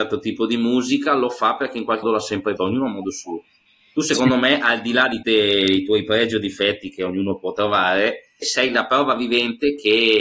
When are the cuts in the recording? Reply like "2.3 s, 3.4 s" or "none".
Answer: 2.0 s, 2.6 s, 5.2 s, 8.4 s

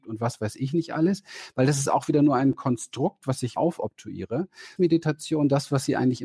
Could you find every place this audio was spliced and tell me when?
3.6 s, 4.8 s

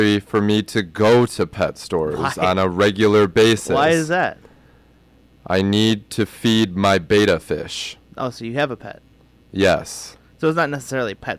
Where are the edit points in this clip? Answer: none

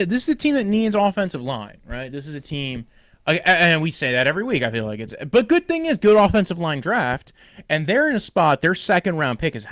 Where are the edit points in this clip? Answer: none

